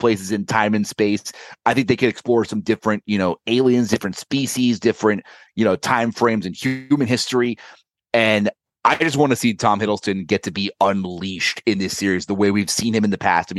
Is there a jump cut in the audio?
no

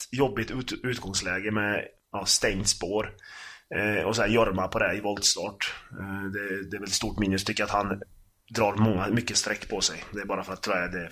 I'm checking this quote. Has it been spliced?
no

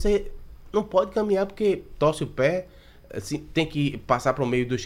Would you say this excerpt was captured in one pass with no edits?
yes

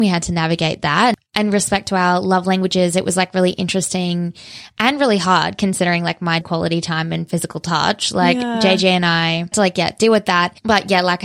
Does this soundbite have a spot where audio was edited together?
yes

